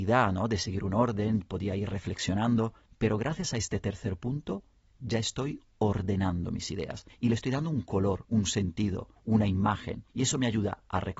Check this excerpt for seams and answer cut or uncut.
uncut